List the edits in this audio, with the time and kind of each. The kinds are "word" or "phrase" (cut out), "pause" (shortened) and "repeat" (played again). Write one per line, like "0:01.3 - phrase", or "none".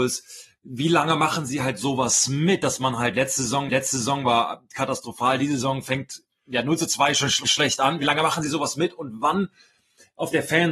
0:03.7 - repeat
0:07.4 - word